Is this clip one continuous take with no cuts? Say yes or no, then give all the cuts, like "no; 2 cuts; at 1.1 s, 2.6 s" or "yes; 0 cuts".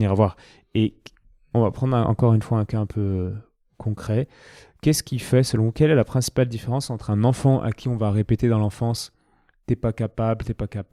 yes; 0 cuts